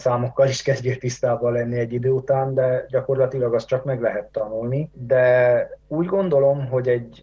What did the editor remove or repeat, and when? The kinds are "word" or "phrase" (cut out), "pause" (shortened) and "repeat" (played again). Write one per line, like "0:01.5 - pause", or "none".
0:05.8 - pause

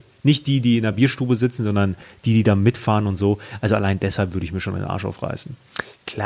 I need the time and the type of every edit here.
none

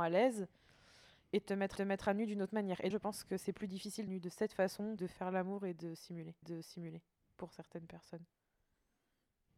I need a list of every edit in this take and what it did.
0:01.8 - repeat
0:02.9 - word
0:04.1 - phrase
0:05.0 - phrase
0:06.4 - repeat

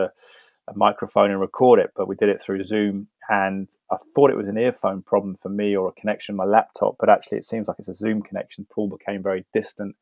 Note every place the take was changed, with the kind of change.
none

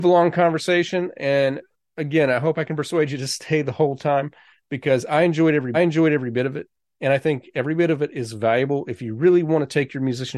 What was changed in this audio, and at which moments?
0:05.7 - repeat

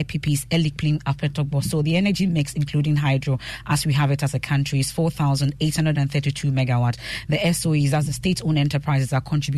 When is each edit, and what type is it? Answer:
none

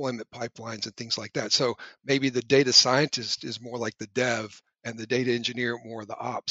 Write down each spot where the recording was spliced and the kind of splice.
none

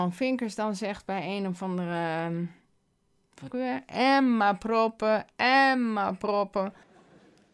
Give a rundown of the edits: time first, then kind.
0:03.5 - phrase

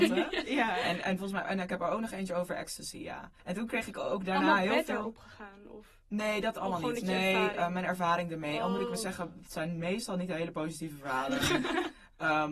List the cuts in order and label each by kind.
0:03.4 - pause

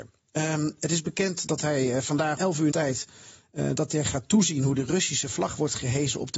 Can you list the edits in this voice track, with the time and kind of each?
0:01.5 - word
0:02.4 - word
0:02.7 - word

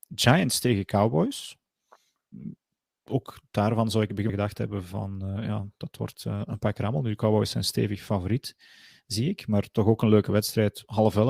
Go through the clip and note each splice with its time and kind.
0:04.3 - phrase

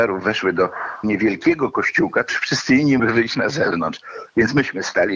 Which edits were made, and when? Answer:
0:01.0 - word
0:02.3 - word
0:03.0 - word

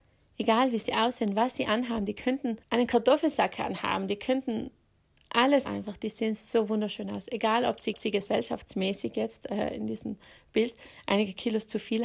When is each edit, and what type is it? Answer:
0:02.6 - pause
0:05.7 - phrase
0:07.9 - repeat

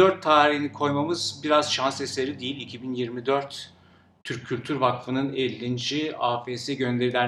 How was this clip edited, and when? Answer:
none

